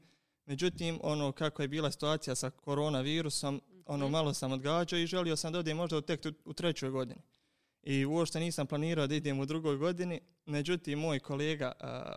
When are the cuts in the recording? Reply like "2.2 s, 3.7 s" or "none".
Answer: 2.6 s